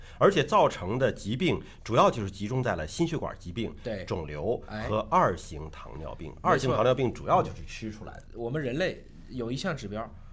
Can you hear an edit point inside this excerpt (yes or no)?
no